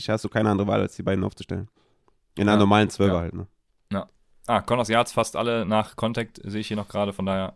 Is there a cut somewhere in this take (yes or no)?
yes